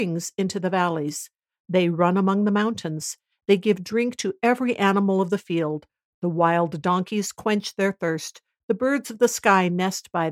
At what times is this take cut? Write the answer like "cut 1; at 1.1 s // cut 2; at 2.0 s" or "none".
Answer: none